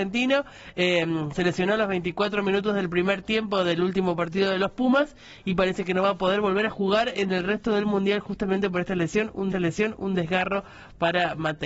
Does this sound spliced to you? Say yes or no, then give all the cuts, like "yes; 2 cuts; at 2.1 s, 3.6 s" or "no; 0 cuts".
yes; 1 cut; at 9.5 s